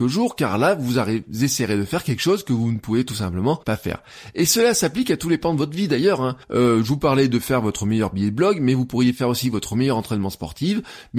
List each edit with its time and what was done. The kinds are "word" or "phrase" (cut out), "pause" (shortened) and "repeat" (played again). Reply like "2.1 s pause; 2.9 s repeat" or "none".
3.6 s pause; 6.4 s pause